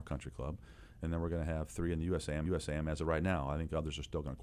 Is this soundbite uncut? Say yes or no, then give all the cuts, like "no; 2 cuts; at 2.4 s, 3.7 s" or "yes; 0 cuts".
no; 1 cut; at 2.4 s